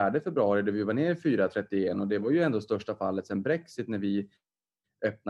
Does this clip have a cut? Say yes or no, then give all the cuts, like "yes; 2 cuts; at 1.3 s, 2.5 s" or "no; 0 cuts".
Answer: no; 0 cuts